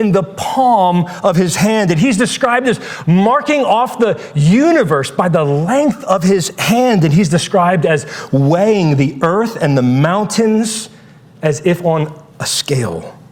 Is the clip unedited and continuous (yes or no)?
yes